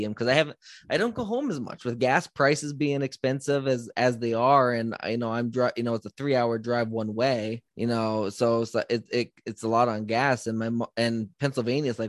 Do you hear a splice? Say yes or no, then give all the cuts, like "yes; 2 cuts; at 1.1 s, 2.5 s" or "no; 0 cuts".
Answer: yes; 1 cut; at 7.7 s